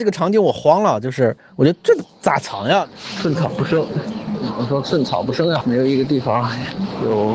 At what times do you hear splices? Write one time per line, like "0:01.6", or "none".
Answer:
0:05.6